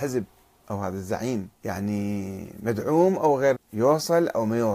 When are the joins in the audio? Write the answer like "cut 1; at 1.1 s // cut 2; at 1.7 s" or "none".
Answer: cut 1; at 1.6 s // cut 2; at 3.5 s